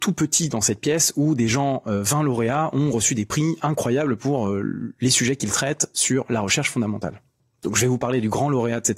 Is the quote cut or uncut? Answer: uncut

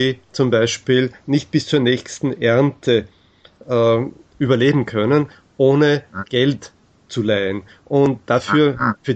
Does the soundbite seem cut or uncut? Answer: uncut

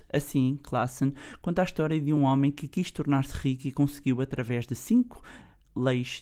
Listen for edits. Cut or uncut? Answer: uncut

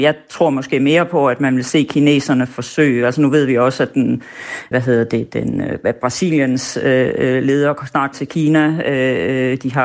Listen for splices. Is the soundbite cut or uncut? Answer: cut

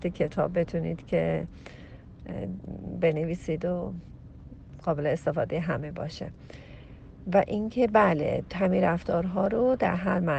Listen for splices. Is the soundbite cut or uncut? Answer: uncut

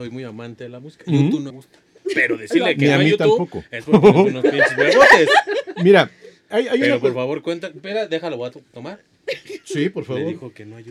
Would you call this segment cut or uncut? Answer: cut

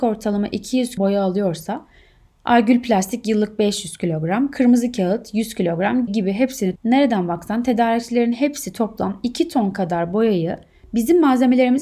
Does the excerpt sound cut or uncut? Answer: cut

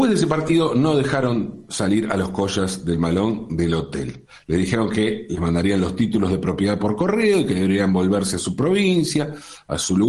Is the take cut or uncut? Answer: uncut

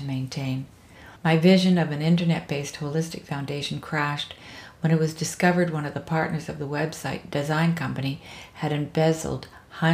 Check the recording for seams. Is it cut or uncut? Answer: cut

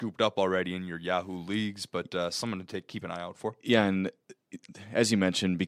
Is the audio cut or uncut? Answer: uncut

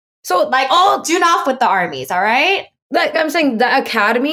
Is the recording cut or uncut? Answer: cut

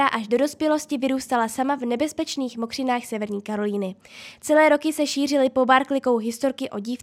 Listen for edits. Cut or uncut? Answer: uncut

